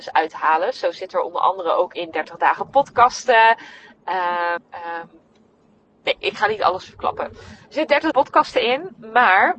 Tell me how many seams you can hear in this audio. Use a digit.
2